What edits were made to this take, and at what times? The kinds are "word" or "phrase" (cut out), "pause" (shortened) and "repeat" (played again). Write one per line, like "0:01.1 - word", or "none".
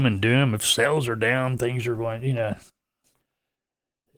none